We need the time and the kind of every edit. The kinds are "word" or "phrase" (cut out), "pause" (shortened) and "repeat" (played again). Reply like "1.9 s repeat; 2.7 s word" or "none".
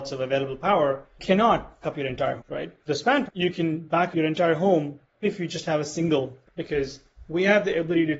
1.2 s word; 1.8 s word; 2.4 s word; 2.9 s word; 3.3 s word; 4.1 s word; 5.2 s word; 6.4 s word